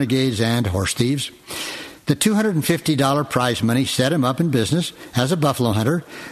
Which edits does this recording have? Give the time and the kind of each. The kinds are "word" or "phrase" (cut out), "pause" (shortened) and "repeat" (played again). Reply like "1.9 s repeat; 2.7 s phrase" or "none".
none